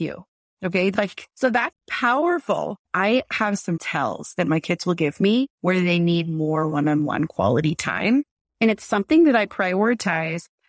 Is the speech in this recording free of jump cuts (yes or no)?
no